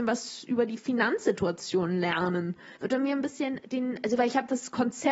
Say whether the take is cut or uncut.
cut